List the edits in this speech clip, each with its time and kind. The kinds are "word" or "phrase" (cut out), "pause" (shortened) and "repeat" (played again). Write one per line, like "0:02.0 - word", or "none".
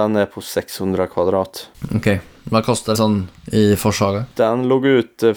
0:02.9 - word